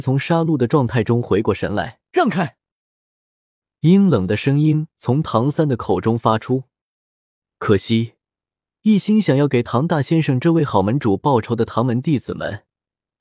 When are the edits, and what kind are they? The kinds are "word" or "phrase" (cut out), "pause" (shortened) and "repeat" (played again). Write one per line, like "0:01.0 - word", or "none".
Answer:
0:02.0 - pause